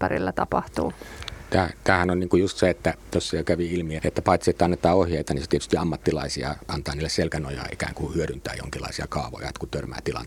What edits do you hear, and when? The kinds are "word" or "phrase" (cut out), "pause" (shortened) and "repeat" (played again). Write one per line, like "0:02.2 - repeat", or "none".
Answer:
0:04.0 - word